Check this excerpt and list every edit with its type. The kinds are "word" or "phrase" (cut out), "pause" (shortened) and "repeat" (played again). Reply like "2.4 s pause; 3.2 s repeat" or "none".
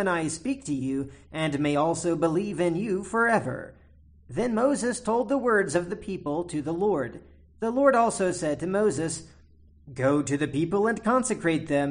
none